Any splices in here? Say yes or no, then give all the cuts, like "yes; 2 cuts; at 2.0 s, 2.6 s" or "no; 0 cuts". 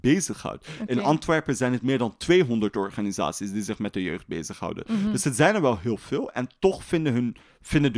no; 0 cuts